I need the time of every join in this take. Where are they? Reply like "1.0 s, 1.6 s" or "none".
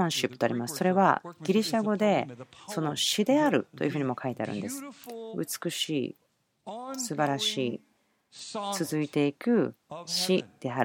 none